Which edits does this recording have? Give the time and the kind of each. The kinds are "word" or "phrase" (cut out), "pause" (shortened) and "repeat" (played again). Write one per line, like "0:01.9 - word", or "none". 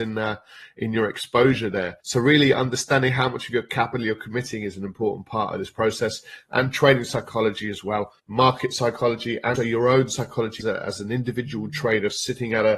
0:02.0 - pause
0:08.2 - pause
0:09.6 - word
0:10.6 - word